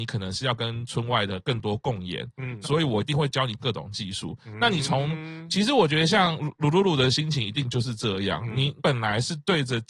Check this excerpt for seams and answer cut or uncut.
uncut